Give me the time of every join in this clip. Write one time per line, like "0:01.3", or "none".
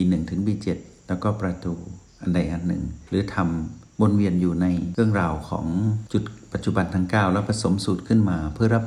none